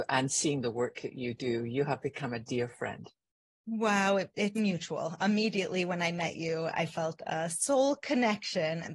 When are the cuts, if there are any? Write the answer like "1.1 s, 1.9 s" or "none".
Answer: 4.6 s